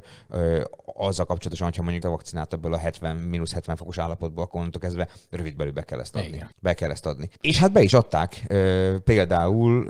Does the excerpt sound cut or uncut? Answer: cut